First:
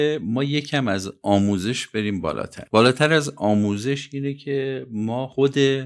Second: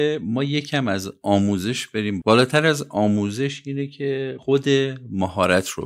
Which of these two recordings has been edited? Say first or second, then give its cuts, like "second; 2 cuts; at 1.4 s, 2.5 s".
second; 2 cuts; at 2.2 s, 4.4 s